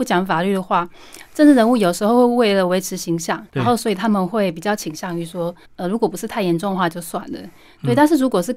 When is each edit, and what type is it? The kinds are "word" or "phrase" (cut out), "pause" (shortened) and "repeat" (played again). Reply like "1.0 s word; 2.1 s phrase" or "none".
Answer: 3.5 s pause; 5.6 s pause